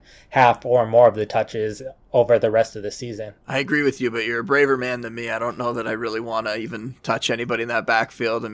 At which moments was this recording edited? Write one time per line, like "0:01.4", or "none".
0:03.4